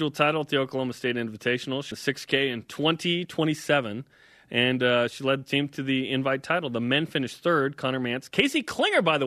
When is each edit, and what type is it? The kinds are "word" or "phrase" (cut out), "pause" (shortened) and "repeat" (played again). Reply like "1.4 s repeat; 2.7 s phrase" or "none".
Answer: 1.9 s word